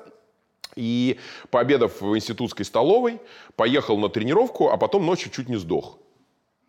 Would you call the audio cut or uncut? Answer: uncut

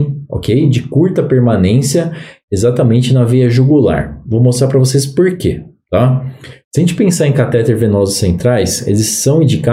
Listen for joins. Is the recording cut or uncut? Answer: uncut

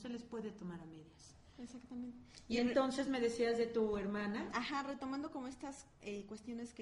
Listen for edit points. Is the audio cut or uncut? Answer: uncut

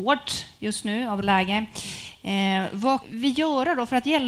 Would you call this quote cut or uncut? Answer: cut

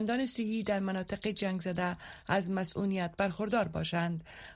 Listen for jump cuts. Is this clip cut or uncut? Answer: uncut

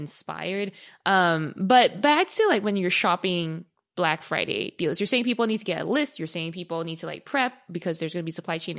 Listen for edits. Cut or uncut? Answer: uncut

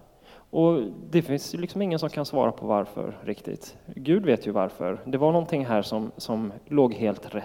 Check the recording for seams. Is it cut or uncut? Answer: uncut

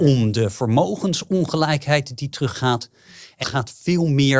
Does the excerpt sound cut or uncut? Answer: cut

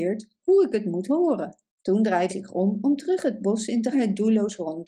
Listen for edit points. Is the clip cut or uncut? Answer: cut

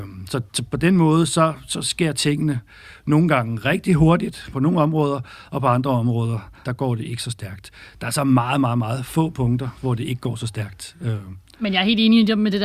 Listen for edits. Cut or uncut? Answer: cut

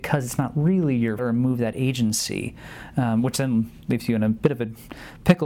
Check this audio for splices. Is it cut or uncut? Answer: cut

